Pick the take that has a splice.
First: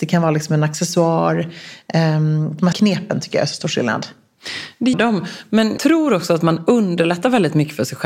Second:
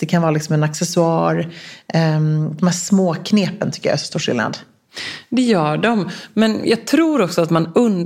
first; 3 cuts; at 2.7 s, 4.9 s, 5.8 s

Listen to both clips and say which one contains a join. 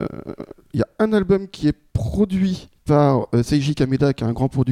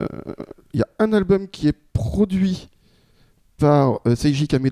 first; 1 cut; at 2.8 s

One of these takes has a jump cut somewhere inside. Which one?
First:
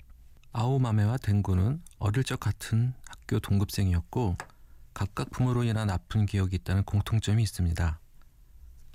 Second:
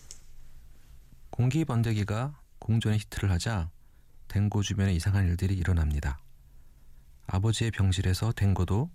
first; 1 cut; at 4.9 s

